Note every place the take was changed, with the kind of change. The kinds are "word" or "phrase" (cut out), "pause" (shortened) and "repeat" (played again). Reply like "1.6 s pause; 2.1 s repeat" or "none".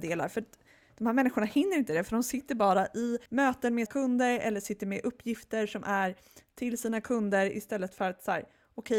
3.3 s pause; 3.9 s word